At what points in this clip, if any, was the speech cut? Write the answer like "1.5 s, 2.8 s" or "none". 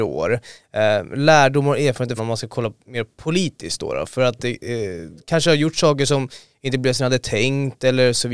2.2 s

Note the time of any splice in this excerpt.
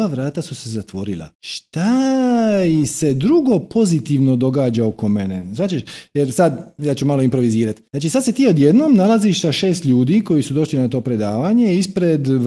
1.3 s, 7.9 s

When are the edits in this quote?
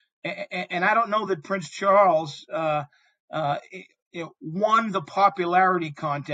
none

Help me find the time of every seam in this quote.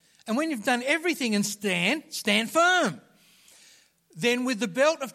none

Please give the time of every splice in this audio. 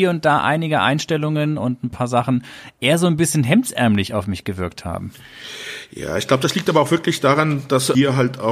none

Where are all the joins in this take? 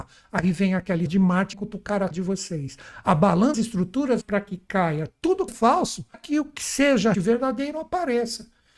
1.1 s, 1.5 s, 2.1 s, 3.5 s, 4.2 s, 5.5 s, 6.1 s, 7.1 s

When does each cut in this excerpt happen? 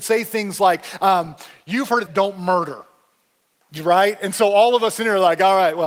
2.1 s

